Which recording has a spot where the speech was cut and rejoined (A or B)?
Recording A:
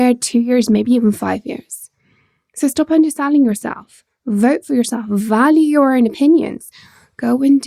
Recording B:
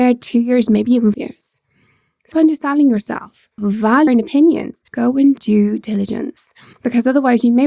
B